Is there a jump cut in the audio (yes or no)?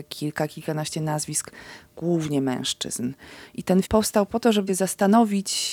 yes